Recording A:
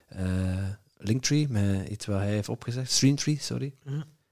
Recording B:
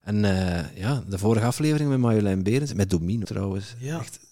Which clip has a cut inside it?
B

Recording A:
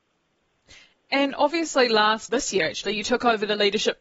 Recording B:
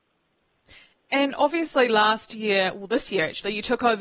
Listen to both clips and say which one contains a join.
A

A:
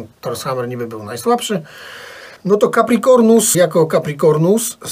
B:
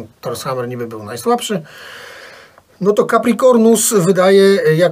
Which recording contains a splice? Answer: A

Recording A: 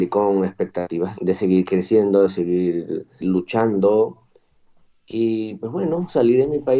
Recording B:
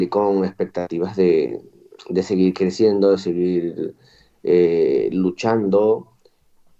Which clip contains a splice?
A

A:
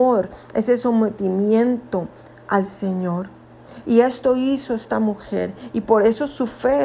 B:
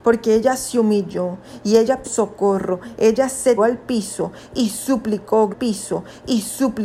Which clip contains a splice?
B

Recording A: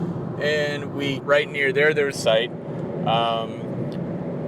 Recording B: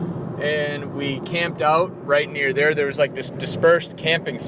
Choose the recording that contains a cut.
A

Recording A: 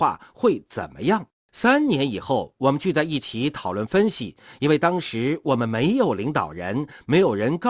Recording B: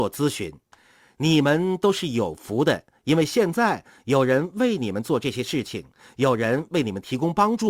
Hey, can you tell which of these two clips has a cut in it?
A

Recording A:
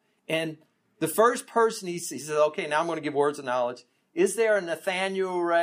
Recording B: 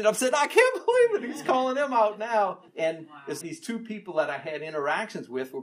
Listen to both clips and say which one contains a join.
B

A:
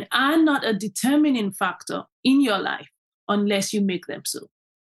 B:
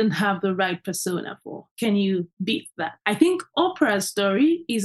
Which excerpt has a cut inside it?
B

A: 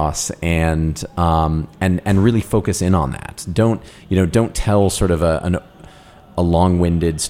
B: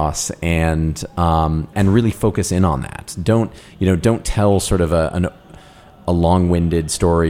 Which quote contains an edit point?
B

